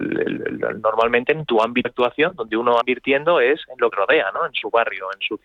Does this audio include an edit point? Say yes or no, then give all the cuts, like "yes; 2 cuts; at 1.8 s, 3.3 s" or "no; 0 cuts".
yes; 3 cuts; at 1.8 s, 2.8 s, 3.9 s